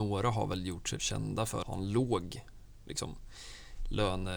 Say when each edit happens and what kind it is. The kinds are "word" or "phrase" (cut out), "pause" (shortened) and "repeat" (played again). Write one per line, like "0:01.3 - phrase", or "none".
0:01.0 - word
0:01.6 - phrase